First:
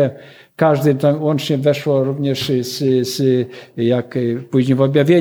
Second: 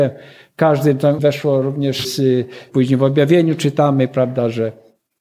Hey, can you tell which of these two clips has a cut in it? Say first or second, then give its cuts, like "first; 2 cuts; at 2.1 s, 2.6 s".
second; 3 cuts; at 1.2 s, 2.0 s, 2.7 s